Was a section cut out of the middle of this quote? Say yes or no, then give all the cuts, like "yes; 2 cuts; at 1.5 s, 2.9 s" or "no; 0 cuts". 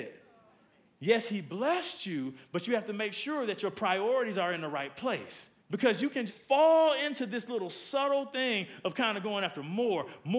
yes; 2 cuts; at 5.6 s, 6.3 s